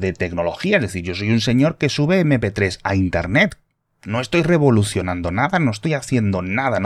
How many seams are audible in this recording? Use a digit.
0